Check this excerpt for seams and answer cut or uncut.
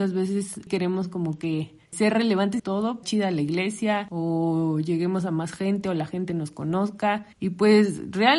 cut